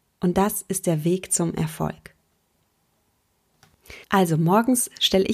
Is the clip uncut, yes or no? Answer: no